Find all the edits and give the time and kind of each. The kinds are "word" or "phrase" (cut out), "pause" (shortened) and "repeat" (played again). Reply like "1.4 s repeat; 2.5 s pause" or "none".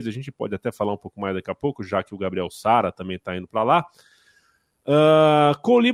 none